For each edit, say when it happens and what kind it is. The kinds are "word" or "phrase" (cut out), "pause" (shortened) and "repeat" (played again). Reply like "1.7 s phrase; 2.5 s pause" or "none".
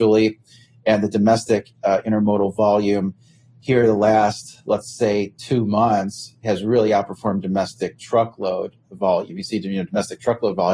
none